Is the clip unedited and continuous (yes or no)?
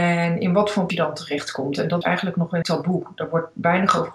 no